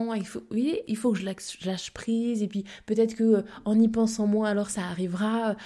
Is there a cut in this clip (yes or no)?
no